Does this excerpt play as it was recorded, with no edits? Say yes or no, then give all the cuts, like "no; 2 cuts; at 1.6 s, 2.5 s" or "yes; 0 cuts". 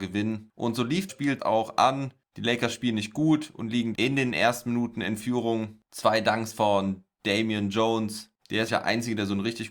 no; 4 cuts; at 1.1 s, 1.4 s, 3.9 s, 8.7 s